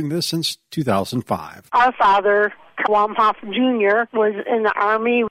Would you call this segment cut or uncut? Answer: cut